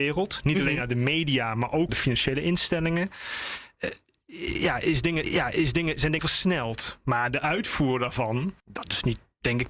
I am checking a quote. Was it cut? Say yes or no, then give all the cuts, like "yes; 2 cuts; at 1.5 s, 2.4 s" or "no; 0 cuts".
yes; 4 cuts; at 1.9 s, 5.2 s, 6.2 s, 8.6 s